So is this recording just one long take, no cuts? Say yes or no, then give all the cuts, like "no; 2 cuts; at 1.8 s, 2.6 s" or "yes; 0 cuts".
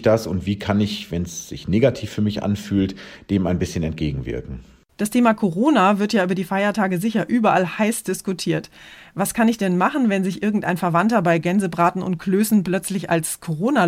yes; 0 cuts